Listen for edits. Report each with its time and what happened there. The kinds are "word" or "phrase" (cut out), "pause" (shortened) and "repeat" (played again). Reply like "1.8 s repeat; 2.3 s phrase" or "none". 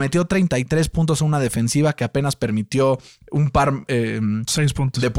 none